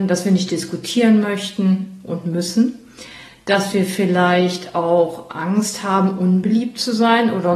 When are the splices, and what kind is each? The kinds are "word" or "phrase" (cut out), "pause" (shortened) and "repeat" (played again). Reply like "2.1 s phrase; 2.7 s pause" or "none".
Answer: none

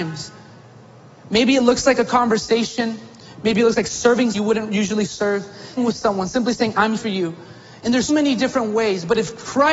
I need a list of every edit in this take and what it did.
4.3 s word; 5.8 s word; 7.0 s word; 8.1 s word

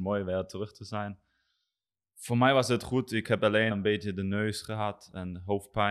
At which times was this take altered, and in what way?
3.7 s word

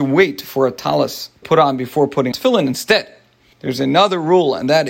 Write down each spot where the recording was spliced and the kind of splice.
1.4 s word; 2.3 s word; 3.5 s word

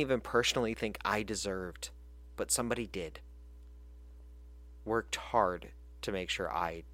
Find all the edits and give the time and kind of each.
none

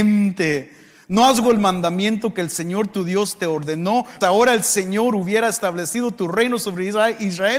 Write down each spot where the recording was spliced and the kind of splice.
1.4 s word; 4.2 s word

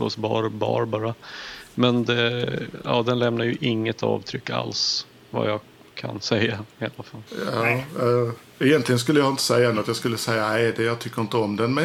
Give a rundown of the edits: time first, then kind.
7.3 s pause

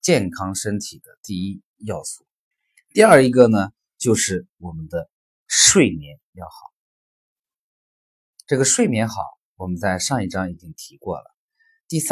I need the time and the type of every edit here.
2.5 s pause; 5.2 s pause

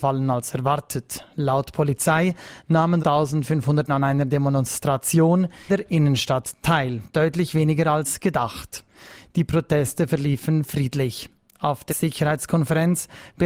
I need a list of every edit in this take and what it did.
3.0 s word; 3.9 s word; 5.7 s word; 11.9 s word

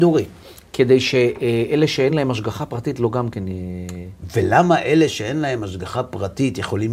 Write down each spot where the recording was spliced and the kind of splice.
none

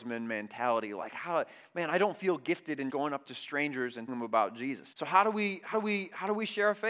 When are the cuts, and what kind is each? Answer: 2.9 s word; 4.1 s word; 4.9 s pause; 5.7 s repeat

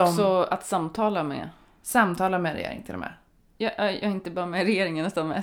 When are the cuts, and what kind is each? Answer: none

